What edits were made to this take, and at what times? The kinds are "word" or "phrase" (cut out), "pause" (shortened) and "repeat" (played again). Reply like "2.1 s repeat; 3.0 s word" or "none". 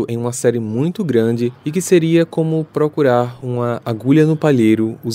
1.6 s pause